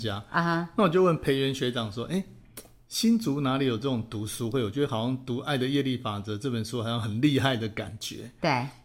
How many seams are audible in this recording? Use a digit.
0